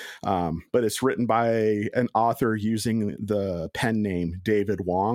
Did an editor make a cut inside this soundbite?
no; 0 cuts

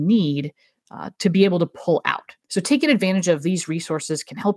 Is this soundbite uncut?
no; 1 cut; at 2.4 s

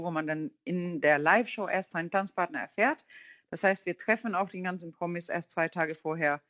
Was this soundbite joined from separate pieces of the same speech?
no; 0 cuts

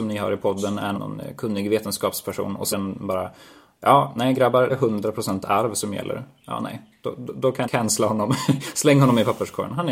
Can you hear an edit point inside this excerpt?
yes; 4 cuts; at 0.9 s, 2.7 s, 4.7 s, 7.6 s

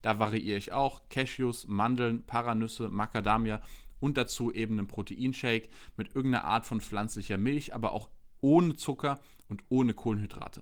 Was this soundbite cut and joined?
no; 0 cuts

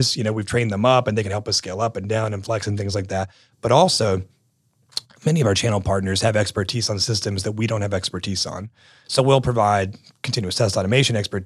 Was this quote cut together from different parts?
no; 0 cuts

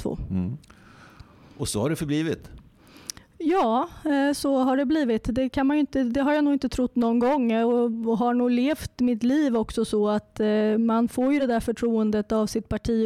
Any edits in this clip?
no; 0 cuts

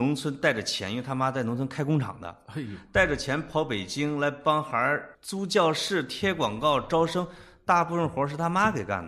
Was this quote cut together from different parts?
yes; 1 cut; at 5.1 s

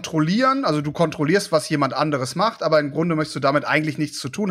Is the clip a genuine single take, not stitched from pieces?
yes; 0 cuts

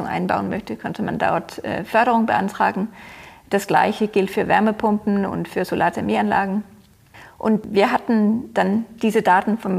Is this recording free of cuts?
yes; 0 cuts

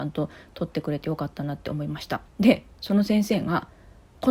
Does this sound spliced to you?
yes; 1 cut; at 2.3 s

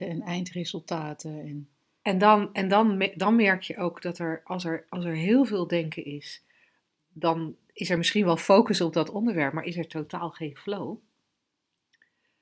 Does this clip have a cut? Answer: no; 0 cuts

